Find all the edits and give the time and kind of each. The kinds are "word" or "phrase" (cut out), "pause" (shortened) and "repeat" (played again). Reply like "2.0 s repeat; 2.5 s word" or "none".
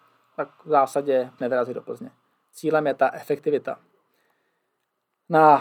1.4 s word